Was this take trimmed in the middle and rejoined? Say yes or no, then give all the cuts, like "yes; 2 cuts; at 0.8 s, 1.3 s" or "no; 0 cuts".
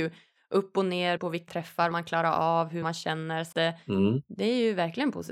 yes; 5 cuts; at 1.2 s, 1.5 s, 1.9 s, 2.8 s, 3.5 s